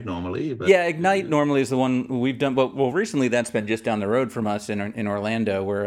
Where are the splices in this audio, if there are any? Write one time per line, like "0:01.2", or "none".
none